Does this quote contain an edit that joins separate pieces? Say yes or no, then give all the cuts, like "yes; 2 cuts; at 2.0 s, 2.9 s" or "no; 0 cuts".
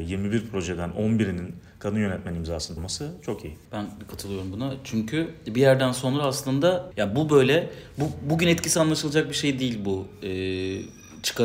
yes; 3 cuts; at 2.8 s, 3.7 s, 6.9 s